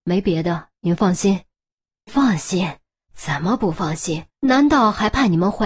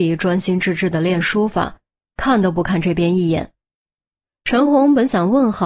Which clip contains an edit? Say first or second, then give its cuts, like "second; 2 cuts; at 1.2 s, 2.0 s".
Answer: first; 2 cuts; at 2.1 s, 4.3 s